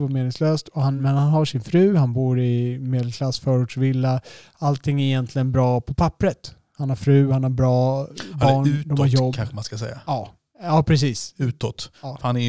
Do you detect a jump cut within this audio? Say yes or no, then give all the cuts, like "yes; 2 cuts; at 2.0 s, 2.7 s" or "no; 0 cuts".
no; 0 cuts